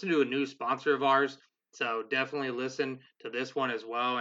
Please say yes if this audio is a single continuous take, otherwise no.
yes